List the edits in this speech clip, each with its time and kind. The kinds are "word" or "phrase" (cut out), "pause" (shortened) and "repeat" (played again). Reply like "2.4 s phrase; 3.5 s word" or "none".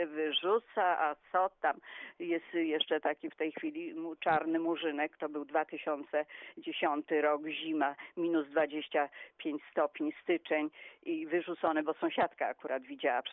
none